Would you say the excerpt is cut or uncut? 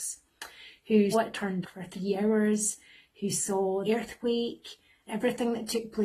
cut